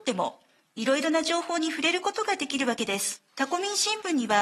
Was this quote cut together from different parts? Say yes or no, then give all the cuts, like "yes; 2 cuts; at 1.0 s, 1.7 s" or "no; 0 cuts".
yes; 1 cut; at 3.3 s